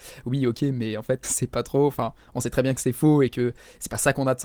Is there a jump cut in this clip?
yes; 1 cut; at 1.2 s

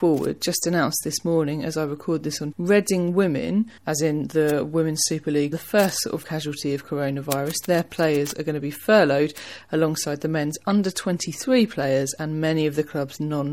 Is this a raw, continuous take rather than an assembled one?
no; 4 cuts; at 2.5 s, 3.8 s, 5.5 s, 6.2 s

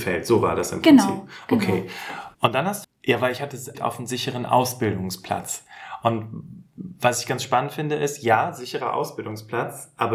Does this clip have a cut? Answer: yes; 3 cuts; at 2.3 s, 2.8 s, 3.7 s

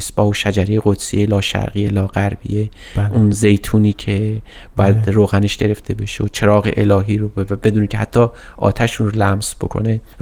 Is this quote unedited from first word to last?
yes; 0 cuts

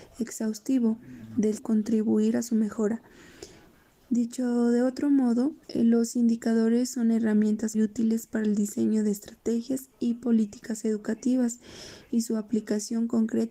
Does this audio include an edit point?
yes; 3 cuts; at 1.6 s, 5.6 s, 7.7 s

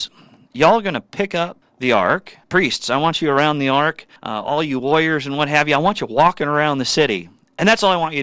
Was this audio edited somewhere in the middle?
yes; 3 cuts; at 1.6 s, 2.4 s, 4.2 s

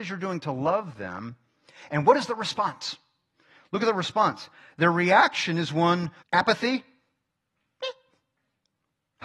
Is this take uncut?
no; 1 cut; at 6.2 s

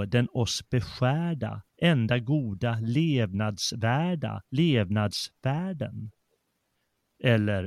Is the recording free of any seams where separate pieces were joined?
no; 2 cuts; at 1.7 s, 4.5 s

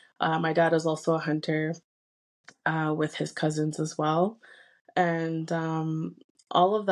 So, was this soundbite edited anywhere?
no; 0 cuts

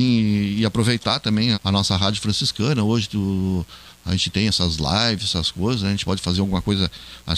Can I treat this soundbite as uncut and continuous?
no; 1 cut; at 1.5 s

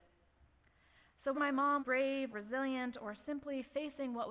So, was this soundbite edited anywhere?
yes; 3 cuts; at 1.3 s, 1.8 s, 2.3 s

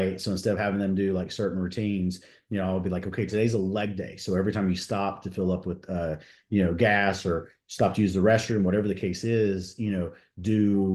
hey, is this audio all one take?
yes; 0 cuts

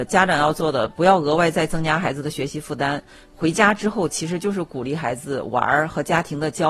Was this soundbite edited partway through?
no; 0 cuts

